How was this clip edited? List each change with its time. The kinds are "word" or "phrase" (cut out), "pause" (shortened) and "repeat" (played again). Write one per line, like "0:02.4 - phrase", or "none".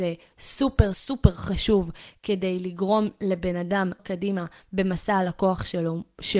0:00.9 - word
0:04.0 - word